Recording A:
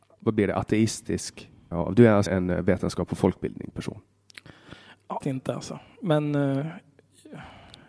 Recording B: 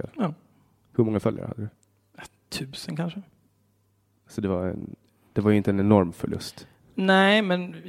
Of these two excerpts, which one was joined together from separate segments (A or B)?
A